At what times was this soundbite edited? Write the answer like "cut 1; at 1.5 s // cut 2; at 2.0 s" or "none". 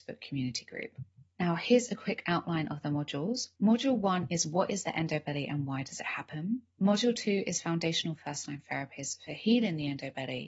cut 1; at 1.3 s // cut 2; at 3.6 s // cut 3; at 6.7 s